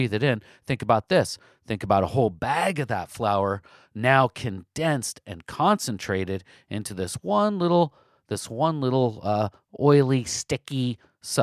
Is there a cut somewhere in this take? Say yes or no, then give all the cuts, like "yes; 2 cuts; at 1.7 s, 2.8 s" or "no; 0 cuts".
no; 0 cuts